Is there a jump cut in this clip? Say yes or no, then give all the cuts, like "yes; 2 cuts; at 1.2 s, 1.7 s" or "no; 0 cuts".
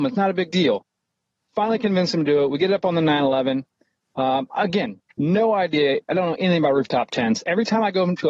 no; 0 cuts